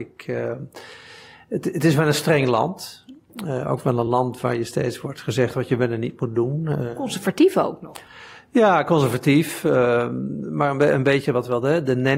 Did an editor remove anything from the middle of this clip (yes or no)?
no